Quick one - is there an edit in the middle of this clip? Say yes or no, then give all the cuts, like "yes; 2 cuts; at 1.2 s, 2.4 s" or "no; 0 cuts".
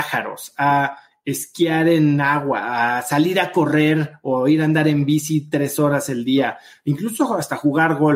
no; 0 cuts